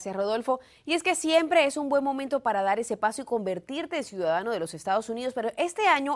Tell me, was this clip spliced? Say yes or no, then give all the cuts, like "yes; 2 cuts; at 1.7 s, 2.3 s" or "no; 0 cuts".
no; 0 cuts